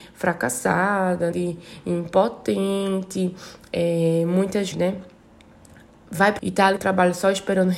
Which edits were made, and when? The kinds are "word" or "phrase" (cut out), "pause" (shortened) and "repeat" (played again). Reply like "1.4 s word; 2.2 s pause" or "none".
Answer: 1.3 s word; 4.7 s word; 6.4 s word; 6.8 s word